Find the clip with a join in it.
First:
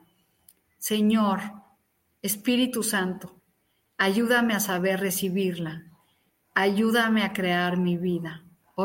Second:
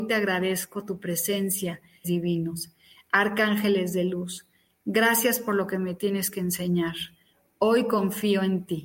second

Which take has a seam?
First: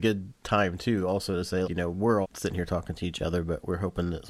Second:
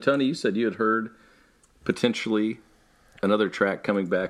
first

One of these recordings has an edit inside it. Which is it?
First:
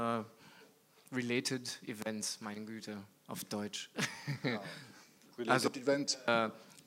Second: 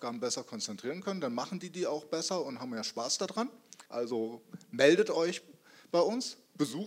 second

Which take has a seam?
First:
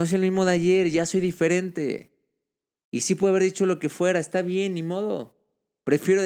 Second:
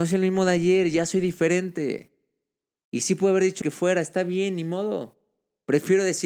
second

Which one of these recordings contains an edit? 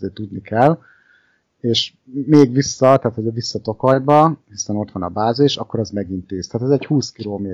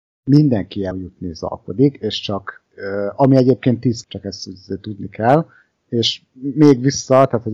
second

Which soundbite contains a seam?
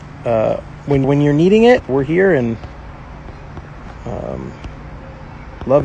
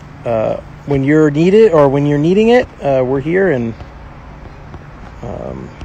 first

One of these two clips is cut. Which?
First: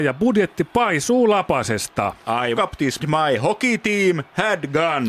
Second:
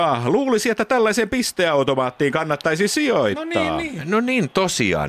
first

